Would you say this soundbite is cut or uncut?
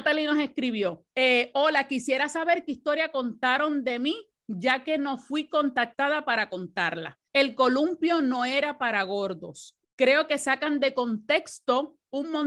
cut